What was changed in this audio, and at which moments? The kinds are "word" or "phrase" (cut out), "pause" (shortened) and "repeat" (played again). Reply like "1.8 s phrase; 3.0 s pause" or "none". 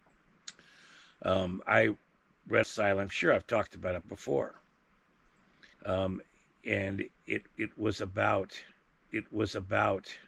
2.6 s phrase; 3.1 s phrase; 5.7 s pause; 9.0 s repeat